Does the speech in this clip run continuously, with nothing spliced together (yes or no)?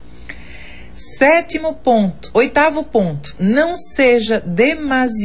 yes